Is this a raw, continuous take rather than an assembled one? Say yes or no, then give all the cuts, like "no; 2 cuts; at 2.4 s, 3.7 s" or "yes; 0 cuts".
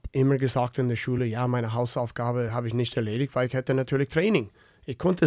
yes; 0 cuts